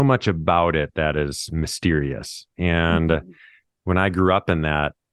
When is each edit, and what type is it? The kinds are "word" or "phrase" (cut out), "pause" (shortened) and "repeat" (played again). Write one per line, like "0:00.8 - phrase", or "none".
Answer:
none